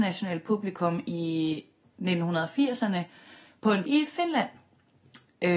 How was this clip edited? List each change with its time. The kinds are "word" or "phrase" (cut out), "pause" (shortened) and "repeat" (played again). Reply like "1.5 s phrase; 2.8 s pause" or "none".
3.8 s word